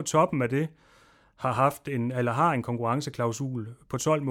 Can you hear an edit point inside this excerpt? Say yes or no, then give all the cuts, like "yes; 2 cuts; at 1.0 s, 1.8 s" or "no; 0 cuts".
no; 0 cuts